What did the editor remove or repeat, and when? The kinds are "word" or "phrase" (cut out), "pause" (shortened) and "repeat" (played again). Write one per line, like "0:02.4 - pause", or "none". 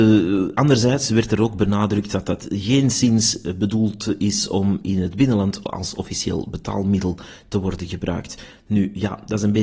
none

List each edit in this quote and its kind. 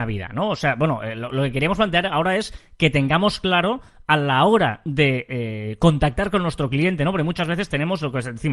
none

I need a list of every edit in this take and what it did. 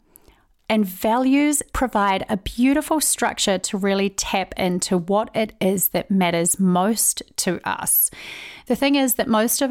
none

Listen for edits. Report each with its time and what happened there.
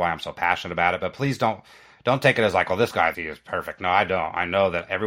0:03.1 - word

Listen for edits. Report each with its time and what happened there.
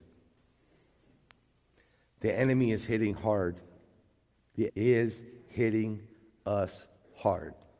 0:04.7 - word

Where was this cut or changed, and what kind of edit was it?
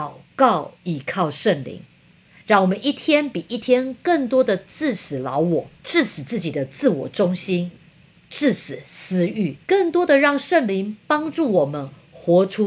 0:05.7 - pause
0:09.6 - pause

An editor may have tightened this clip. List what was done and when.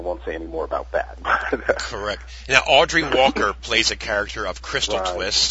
none

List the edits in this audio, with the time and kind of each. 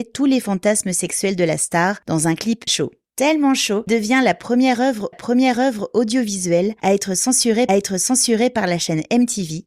0:02.7 - word
0:03.9 - word
0:05.1 - repeat
0:07.7 - repeat

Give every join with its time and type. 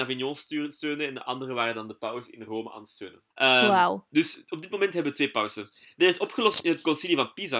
0:03.3 - pause

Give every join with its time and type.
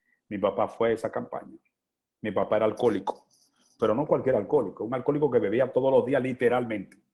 none

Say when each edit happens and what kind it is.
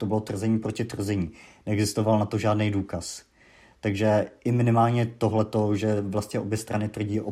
none

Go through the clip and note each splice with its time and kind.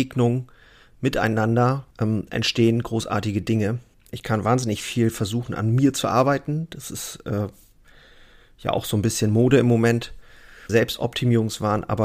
0:01.9 - pause
0:03.9 - pause
0:10.7 - word

